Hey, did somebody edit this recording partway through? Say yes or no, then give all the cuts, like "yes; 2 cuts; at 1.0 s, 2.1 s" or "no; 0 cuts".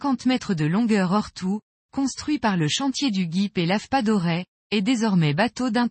no; 0 cuts